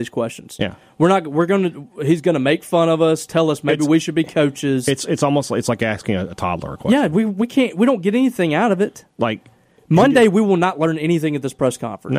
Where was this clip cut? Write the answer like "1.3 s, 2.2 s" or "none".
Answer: none